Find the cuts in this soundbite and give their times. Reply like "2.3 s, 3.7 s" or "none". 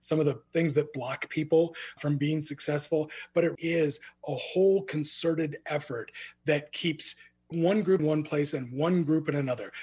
3.5 s, 8.0 s